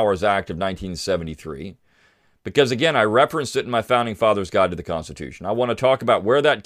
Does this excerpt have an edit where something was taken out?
no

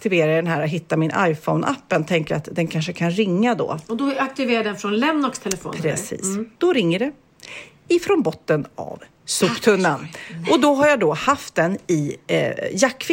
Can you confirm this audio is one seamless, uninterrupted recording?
no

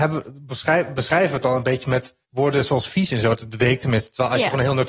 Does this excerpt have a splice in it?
yes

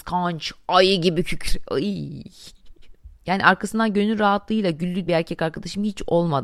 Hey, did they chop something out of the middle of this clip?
yes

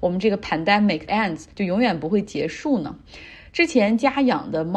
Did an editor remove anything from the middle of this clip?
yes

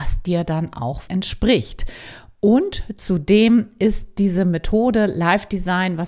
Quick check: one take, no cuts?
no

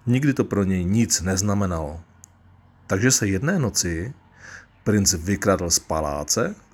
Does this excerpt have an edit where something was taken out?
no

